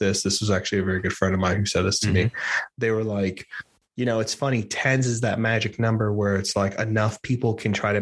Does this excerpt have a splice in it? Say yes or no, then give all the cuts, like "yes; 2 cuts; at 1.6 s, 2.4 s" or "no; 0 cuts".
no; 0 cuts